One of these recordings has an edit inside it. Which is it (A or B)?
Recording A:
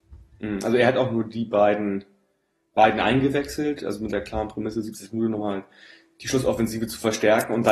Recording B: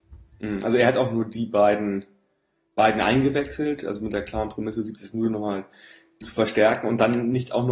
B